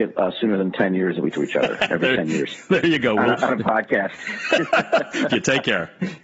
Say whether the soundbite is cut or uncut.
cut